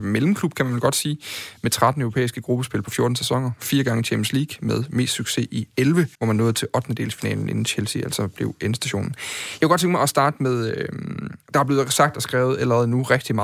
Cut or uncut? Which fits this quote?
cut